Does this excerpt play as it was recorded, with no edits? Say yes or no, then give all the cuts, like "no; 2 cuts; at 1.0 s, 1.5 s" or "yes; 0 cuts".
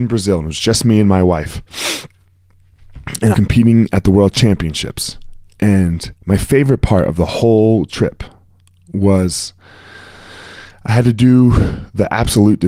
no; 2 cuts; at 3.3 s, 6.2 s